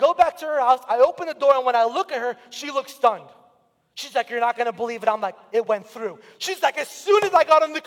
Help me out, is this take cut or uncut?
uncut